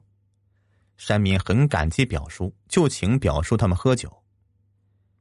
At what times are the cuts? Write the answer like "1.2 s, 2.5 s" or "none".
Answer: 2.6 s